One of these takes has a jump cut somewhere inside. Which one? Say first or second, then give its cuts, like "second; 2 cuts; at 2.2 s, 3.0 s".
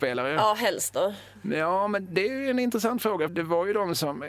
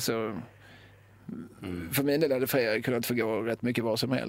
first; 1 cut; at 3.3 s